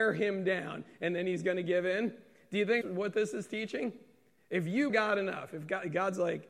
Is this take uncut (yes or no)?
no